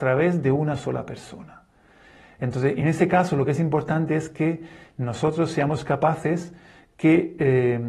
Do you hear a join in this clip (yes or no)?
no